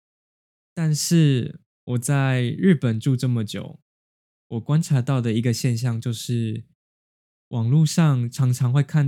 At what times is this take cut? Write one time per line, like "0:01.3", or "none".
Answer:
none